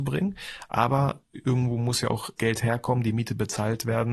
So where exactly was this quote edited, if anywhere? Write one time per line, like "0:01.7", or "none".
0:01.2
0:02.4